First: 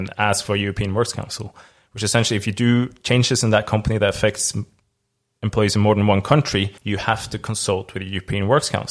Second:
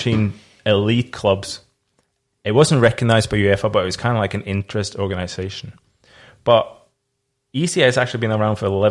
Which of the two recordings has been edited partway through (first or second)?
first